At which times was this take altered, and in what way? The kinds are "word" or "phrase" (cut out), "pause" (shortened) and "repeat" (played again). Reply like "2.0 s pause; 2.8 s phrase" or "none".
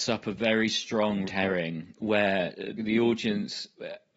1.3 s word; 2.8 s word